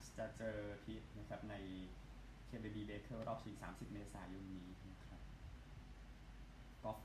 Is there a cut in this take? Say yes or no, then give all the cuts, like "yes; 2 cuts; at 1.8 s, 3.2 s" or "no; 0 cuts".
yes; 1 cut; at 1.1 s